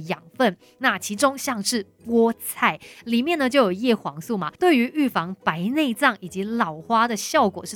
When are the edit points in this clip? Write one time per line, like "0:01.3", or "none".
0:04.6